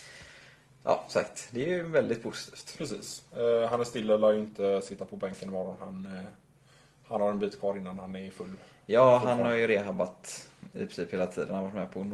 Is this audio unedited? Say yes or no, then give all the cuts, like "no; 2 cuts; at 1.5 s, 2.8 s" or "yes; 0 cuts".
yes; 0 cuts